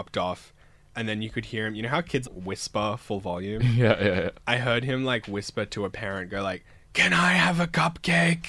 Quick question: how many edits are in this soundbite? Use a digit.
1